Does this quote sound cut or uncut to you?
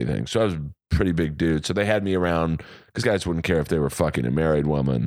cut